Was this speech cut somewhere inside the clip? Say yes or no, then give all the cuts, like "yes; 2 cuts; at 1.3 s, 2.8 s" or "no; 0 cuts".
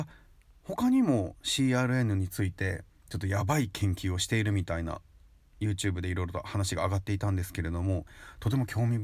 no; 0 cuts